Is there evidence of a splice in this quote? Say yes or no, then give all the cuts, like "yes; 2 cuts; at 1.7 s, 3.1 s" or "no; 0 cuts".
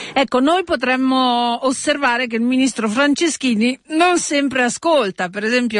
no; 0 cuts